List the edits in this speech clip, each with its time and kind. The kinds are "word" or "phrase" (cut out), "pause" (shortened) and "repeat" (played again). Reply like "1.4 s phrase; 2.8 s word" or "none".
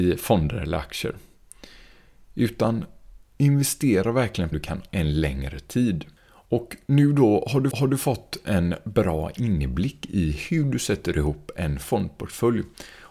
3.2 s pause; 4.5 s phrase; 4.9 s word; 6.2 s pause; 7.7 s repeat

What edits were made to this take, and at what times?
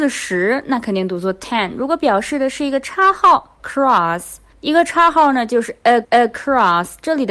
3.6 s phrase; 6.0 s repeat

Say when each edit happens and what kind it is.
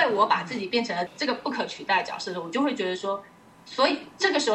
none

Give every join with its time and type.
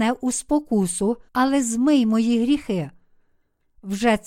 1.3 s pause

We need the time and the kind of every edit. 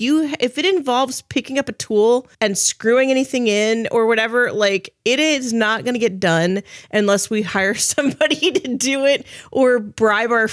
2.3 s pause

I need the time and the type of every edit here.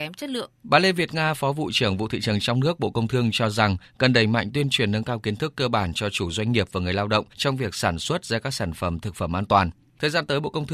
none

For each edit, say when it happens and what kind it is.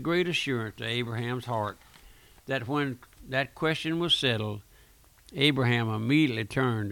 none

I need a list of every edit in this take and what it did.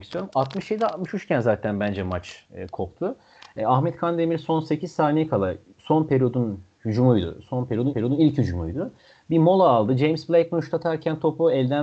7.9 s repeat

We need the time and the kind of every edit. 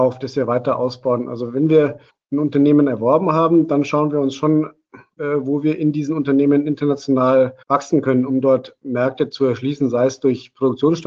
2.1 s pause; 5.2 s phrase; 7.6 s pause

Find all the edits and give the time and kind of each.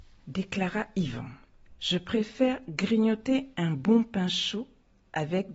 none

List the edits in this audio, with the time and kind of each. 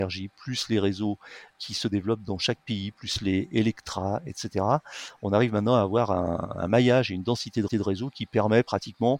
1.5 s word; 7.7 s repeat

